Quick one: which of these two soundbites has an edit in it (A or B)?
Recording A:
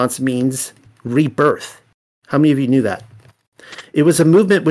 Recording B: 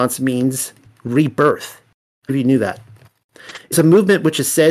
B